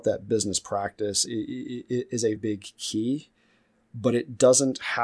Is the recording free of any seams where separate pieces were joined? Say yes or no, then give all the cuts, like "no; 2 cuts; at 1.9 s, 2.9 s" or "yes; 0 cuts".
no; 2 cuts; at 1.3 s, 2.4 s